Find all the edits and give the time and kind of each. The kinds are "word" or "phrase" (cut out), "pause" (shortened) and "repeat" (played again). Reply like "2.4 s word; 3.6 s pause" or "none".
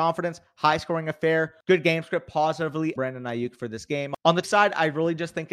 3.0 s word; 4.4 s word

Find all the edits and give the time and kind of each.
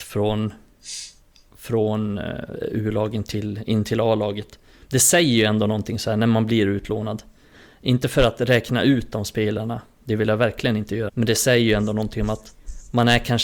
11.1 s word

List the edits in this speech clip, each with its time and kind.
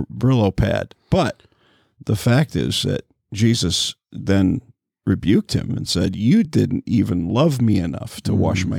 none

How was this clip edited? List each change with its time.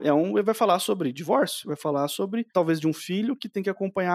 2.5 s phrase

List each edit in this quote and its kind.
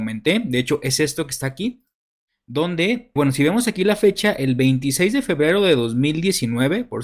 3.2 s word

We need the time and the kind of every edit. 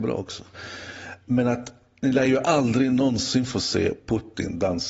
none

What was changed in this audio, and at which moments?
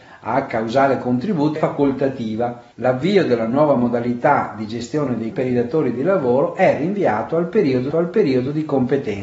1.6 s word; 2.7 s pause; 5.3 s word; 7.9 s repeat

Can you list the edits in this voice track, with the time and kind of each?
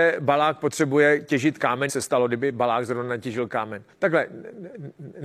1.9 s phrase; 3.9 s pause

